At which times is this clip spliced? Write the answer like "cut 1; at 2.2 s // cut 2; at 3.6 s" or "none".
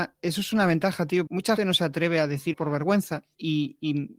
cut 1; at 1.3 s // cut 2; at 1.6 s // cut 3; at 2.5 s